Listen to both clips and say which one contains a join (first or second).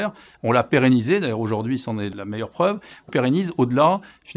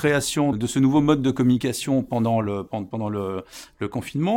first